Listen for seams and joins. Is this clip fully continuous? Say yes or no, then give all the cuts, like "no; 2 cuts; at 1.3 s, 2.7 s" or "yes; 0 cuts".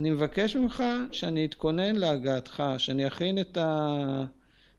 yes; 0 cuts